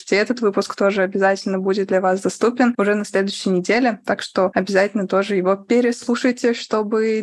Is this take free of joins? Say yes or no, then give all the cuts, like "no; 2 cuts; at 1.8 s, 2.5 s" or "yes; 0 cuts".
yes; 0 cuts